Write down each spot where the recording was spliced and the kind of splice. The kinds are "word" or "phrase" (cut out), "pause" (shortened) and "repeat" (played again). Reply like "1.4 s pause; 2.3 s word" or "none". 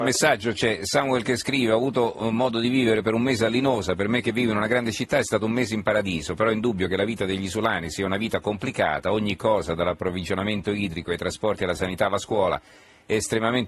none